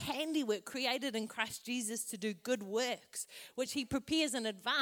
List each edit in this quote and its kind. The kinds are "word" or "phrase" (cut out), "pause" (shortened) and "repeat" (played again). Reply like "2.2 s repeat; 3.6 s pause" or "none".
none